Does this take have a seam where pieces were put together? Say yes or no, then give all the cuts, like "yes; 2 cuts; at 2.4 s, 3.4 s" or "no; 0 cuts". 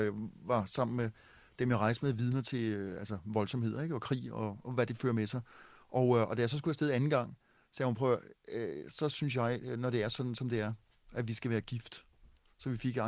no; 0 cuts